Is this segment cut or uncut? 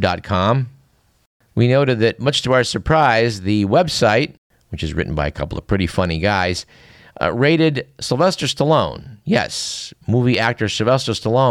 uncut